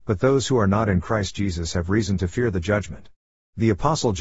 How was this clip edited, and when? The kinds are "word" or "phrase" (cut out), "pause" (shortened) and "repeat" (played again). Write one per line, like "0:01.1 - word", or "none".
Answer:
none